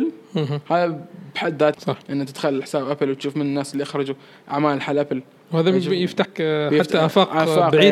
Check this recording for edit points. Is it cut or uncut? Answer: cut